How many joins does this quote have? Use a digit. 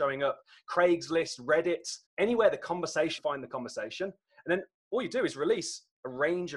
2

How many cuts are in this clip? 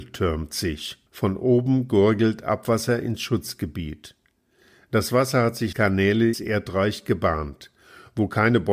3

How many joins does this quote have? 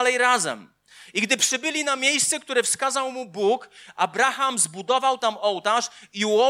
0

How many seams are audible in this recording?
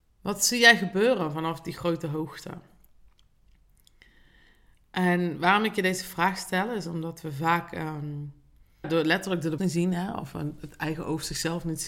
2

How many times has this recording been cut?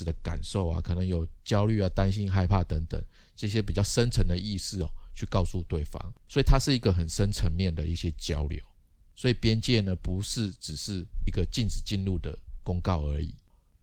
1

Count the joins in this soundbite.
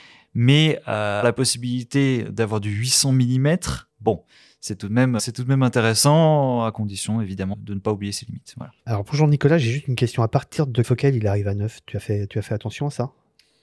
6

